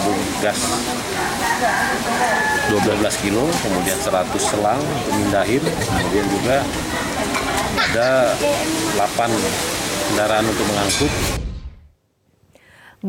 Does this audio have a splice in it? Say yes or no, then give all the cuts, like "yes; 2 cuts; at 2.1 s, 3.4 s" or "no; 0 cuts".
no; 0 cuts